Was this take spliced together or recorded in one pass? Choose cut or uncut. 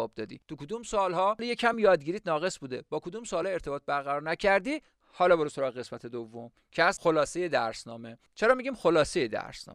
uncut